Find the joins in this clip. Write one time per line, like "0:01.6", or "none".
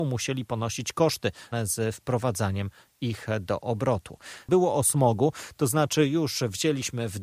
0:01.5